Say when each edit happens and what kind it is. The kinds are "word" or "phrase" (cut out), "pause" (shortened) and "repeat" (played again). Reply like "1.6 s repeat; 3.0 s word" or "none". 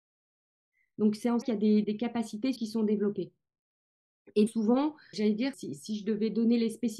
1.4 s word; 1.8 s word; 2.6 s word; 4.5 s word; 5.1 s word; 5.5 s word